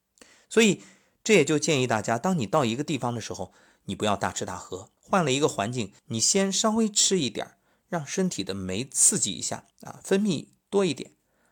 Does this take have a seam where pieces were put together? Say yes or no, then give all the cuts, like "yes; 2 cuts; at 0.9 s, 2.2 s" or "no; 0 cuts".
yes; 3 cuts; at 5.0 s, 6.0 s, 9.7 s